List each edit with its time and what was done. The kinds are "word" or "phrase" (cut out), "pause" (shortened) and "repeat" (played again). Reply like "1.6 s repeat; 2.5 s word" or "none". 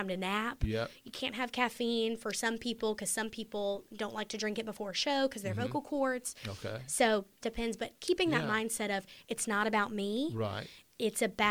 7.4 s phrase